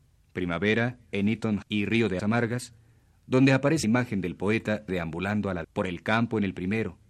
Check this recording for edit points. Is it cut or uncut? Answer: cut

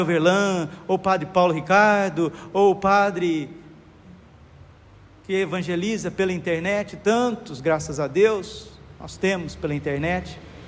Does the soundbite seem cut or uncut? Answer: uncut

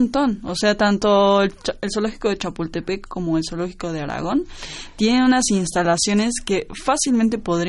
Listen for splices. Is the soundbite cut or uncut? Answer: uncut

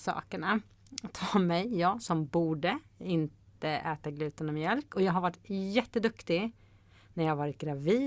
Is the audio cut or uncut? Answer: uncut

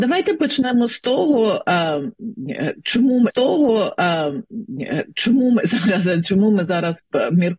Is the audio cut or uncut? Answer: cut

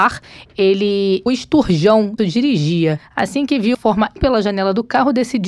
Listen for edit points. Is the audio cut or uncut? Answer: cut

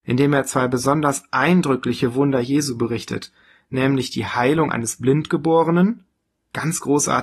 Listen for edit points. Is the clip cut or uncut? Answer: uncut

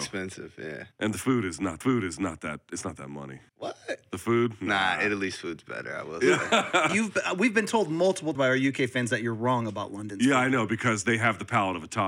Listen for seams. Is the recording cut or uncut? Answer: cut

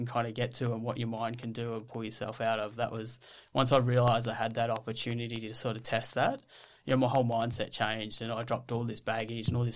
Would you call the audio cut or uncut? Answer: uncut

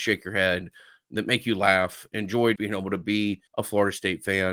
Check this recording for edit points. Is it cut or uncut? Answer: cut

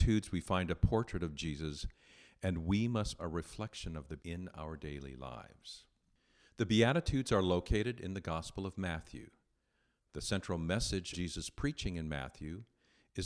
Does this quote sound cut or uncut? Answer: cut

